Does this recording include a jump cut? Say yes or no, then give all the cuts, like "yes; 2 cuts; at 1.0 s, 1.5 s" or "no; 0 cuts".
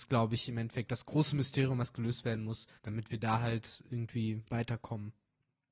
yes; 1 cut; at 2.8 s